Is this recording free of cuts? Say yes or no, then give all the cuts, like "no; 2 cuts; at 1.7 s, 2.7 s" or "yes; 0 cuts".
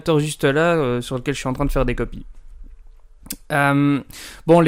yes; 0 cuts